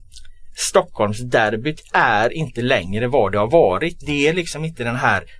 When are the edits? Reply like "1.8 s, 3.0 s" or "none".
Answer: none